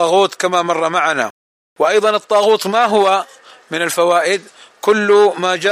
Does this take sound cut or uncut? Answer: uncut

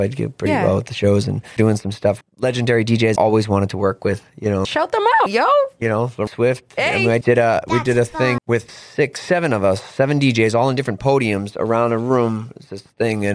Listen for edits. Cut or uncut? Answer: cut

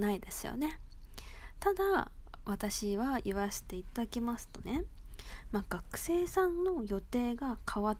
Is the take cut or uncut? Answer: uncut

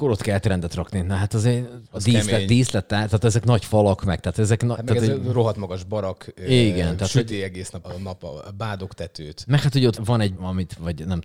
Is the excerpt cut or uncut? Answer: cut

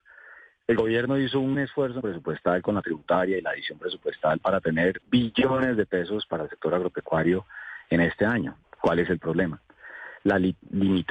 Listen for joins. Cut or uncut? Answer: cut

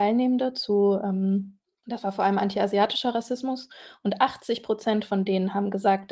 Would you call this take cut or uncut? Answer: uncut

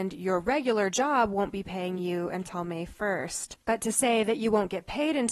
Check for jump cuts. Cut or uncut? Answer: uncut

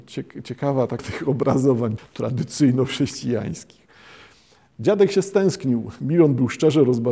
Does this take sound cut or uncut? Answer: cut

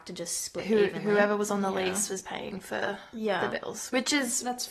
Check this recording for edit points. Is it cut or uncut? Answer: uncut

